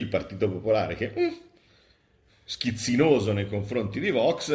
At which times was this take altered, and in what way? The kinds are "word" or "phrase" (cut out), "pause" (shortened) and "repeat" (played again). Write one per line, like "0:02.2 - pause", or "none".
none